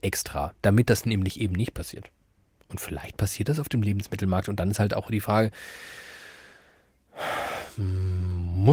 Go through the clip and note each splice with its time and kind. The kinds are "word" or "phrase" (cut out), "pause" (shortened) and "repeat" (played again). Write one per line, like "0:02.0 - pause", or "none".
none